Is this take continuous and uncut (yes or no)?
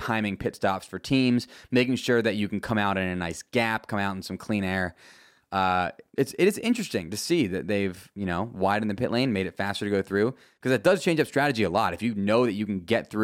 no